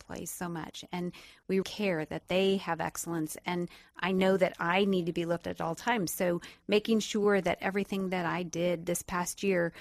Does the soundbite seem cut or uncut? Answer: cut